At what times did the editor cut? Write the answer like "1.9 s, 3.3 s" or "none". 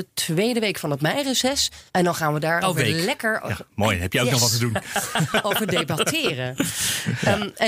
1.9 s, 2.6 s